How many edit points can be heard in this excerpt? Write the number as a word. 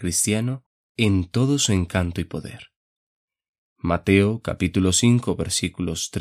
zero